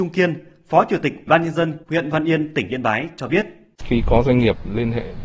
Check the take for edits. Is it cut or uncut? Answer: cut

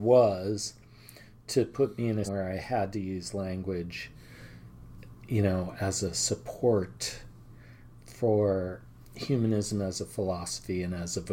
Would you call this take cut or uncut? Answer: cut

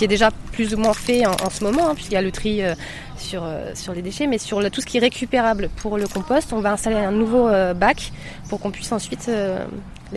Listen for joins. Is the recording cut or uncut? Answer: uncut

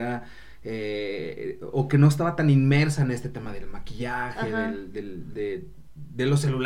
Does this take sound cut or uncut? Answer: uncut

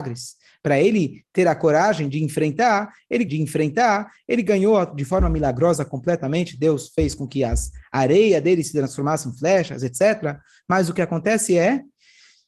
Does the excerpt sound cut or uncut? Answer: cut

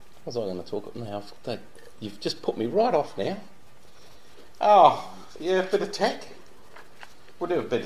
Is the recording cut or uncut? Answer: uncut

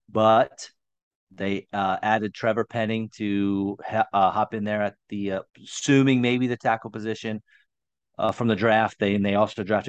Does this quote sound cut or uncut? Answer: cut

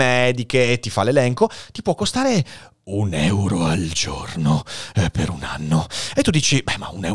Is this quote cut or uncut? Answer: uncut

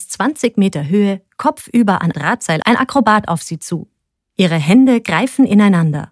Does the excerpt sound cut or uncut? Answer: cut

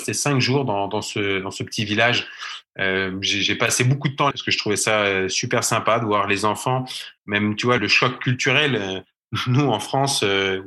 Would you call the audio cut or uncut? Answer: cut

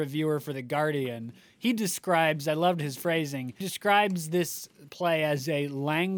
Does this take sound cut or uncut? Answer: cut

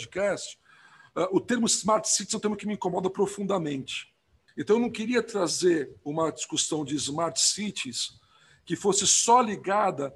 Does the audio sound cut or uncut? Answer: uncut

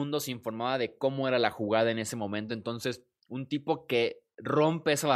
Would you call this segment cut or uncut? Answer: uncut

